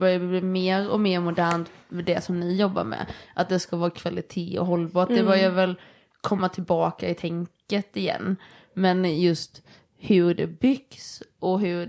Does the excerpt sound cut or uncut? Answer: uncut